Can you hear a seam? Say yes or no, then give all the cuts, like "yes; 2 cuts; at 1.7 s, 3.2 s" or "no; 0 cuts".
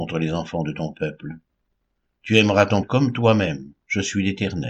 yes; 1 cut; at 2.8 s